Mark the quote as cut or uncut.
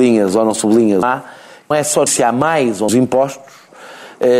cut